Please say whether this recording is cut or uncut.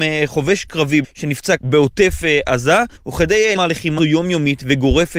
cut